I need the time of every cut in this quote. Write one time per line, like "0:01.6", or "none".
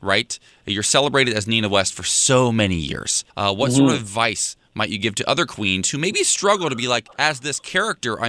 0:03.3
0:07.1